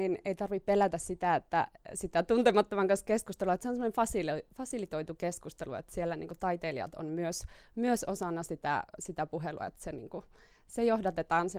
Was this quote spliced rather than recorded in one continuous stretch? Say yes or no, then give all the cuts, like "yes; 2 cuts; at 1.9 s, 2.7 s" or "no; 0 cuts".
no; 0 cuts